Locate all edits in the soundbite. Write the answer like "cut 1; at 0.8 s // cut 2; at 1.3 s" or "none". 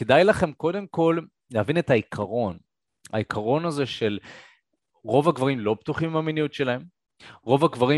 none